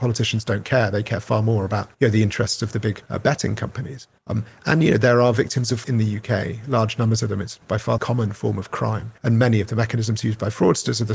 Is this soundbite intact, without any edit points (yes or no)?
no